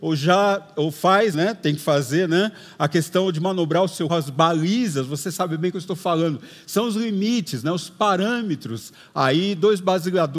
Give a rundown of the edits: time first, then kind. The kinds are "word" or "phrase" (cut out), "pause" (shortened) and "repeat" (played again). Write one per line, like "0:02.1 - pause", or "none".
0:01.3 - word
0:04.1 - word